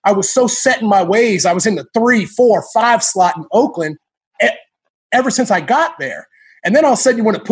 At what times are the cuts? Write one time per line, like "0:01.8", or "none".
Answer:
none